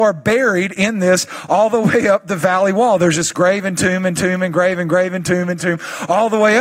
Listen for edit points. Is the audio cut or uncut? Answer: uncut